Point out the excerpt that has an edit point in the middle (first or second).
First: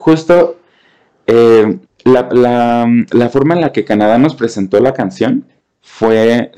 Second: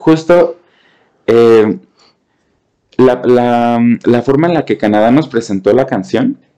first